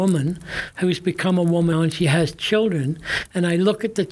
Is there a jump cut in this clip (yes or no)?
yes